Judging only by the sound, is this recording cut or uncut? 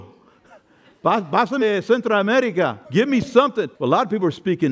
cut